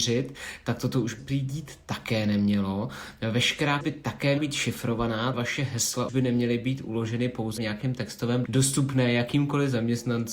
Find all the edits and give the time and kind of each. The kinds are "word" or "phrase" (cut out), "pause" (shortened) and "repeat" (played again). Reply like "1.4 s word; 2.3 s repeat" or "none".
1.2 s word; 3.8 s word; 4.4 s word; 5.3 s word; 6.1 s word; 7.6 s word; 8.5 s word